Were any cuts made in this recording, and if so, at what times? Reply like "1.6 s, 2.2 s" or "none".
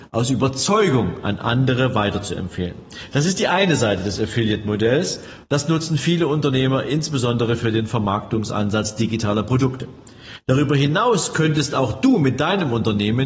none

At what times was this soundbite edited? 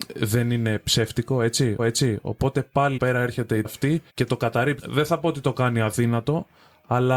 1.8 s, 3.0 s, 3.6 s, 4.1 s, 4.8 s

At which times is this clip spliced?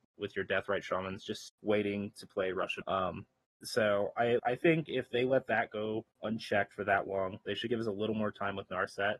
1.5 s, 2.8 s, 3.4 s, 4.4 s, 6.1 s

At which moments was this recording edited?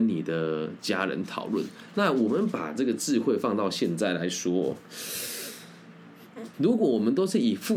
6.5 s

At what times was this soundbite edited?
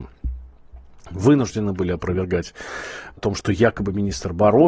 3.2 s

